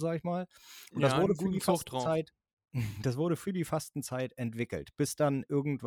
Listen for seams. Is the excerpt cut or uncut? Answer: uncut